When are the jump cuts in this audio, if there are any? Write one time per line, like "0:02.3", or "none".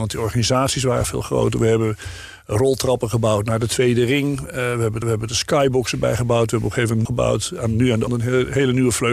0:05.0
0:07.0
0:08.1